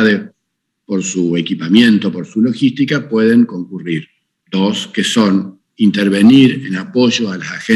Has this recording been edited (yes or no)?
yes